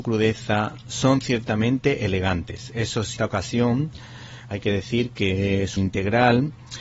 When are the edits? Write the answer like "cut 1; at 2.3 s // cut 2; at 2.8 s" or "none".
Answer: cut 1; at 3.2 s // cut 2; at 5.8 s